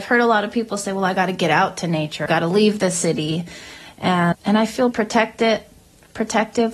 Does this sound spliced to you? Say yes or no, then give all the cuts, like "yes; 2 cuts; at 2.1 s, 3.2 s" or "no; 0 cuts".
yes; 3 cuts; at 2.3 s, 4.3 s, 4.9 s